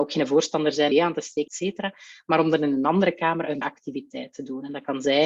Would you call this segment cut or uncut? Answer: cut